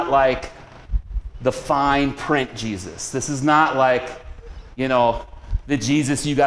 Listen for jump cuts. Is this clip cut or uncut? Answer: uncut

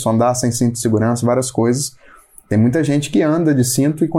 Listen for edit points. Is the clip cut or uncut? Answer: uncut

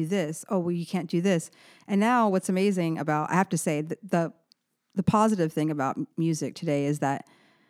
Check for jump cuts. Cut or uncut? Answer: uncut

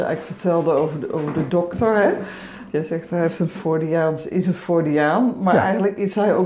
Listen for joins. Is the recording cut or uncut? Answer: uncut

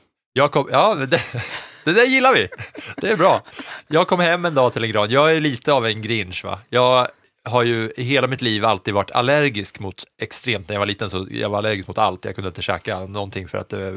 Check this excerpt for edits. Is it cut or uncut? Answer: uncut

